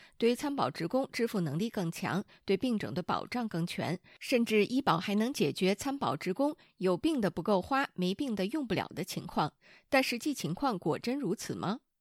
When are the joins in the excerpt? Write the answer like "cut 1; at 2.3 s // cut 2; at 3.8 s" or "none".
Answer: none